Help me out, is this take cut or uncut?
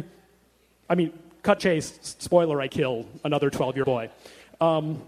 cut